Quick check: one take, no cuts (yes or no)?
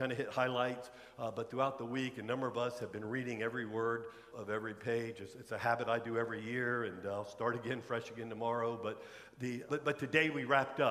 no